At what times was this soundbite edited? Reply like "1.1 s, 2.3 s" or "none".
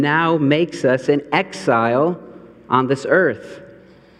none